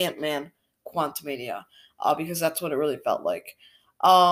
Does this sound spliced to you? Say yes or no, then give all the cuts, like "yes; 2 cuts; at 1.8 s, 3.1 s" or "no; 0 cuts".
no; 0 cuts